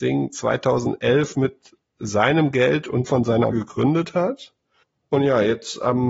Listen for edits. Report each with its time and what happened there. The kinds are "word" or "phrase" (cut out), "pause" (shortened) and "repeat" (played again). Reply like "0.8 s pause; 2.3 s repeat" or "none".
3.1 s phrase; 3.5 s word; 4.8 s pause